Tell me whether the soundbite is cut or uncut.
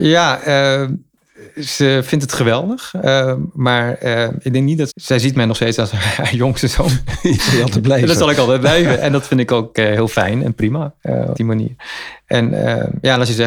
cut